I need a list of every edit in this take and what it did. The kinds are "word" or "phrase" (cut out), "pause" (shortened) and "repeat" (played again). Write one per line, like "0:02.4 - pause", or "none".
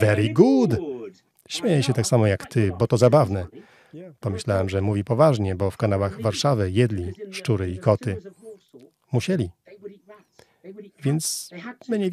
none